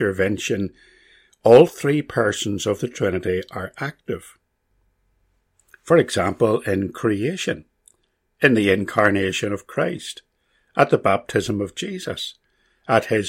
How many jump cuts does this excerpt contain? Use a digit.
0